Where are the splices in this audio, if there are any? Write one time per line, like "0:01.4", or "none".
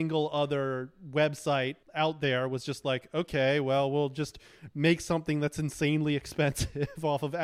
0:01.8